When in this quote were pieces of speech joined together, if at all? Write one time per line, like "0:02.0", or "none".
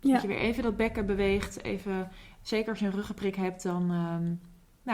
none